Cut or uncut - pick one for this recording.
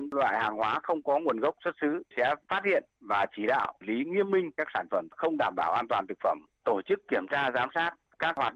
cut